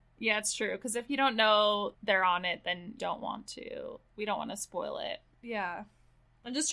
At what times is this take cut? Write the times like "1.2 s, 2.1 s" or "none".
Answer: 1.9 s, 3.0 s